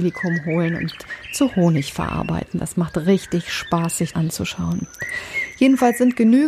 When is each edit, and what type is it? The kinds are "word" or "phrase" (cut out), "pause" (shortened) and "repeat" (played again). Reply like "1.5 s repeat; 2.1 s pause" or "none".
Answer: 4.1 s word